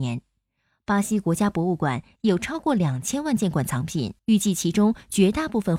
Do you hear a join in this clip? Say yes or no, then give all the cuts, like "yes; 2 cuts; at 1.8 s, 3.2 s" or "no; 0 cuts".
yes; 1 cut; at 4.2 s